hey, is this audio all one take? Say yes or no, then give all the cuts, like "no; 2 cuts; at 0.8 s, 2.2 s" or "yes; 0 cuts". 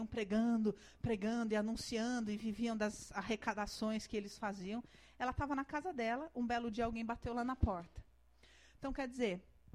yes; 0 cuts